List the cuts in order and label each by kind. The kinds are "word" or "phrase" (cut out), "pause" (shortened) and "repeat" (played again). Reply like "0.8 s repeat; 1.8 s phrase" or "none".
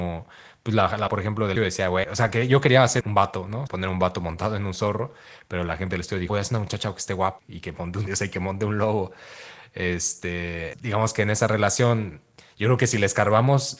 1.1 s word; 1.6 s word; 2.0 s word; 3.0 s word; 3.7 s word; 6.3 s word; 7.4 s word; 8.1 s word; 10.7 s word

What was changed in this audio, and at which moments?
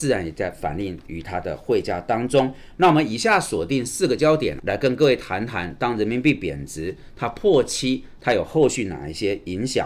4.6 s word

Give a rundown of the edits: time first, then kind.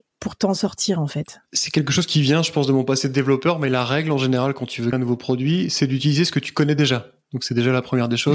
4.9 s word

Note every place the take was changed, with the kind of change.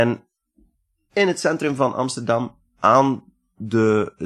none

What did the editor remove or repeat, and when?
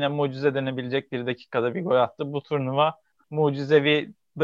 3.2 s word

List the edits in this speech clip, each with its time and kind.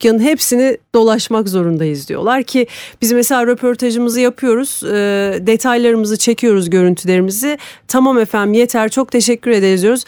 none

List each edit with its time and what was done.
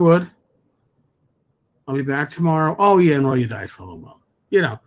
none

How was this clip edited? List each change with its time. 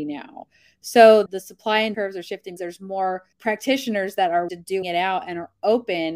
1.3 s word; 1.9 s word; 2.6 s word; 3.3 s pause; 4.5 s word; 4.8 s phrase

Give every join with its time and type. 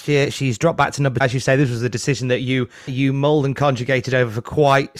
1.2 s word; 2.9 s word

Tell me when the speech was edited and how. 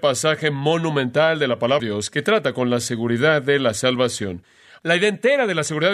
1.8 s word

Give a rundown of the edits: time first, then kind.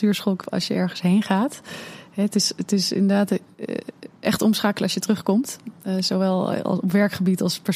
none

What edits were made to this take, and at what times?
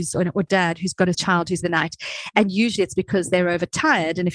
1.1 s word; 1.6 s phrase

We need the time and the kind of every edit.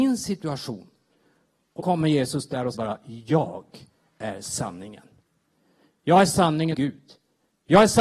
1.8 s word; 2.7 s word; 6.7 s word

